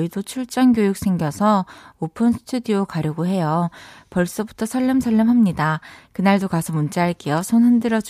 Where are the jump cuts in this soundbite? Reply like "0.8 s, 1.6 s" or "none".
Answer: none